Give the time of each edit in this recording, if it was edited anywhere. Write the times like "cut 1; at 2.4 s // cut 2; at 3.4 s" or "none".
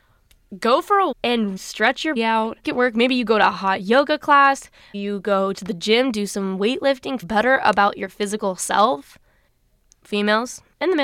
cut 1; at 1.1 s // cut 2; at 1.6 s // cut 3; at 2.2 s // cut 4; at 2.6 s // cut 5; at 4.9 s // cut 6; at 5.5 s // cut 7; at 7.2 s // cut 8; at 10.1 s